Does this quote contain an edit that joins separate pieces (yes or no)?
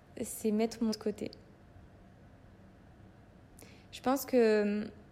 yes